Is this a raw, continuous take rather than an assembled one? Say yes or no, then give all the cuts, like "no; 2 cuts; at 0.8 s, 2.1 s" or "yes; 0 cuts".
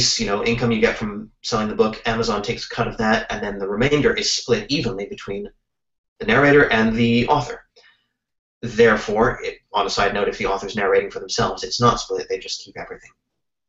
yes; 0 cuts